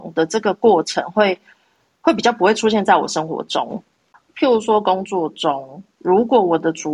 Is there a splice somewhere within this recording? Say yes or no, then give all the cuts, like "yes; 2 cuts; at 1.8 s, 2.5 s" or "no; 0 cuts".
no; 0 cuts